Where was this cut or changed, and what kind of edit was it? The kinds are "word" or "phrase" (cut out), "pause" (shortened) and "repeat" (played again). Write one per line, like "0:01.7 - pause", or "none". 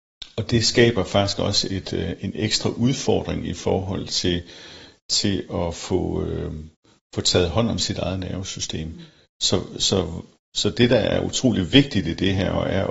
none